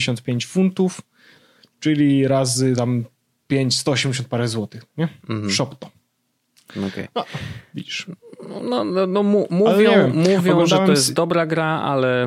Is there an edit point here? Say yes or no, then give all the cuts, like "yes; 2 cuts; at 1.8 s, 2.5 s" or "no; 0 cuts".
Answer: no; 0 cuts